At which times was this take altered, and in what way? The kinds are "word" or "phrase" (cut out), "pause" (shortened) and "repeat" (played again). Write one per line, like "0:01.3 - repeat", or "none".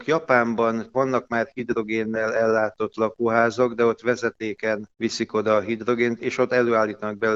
none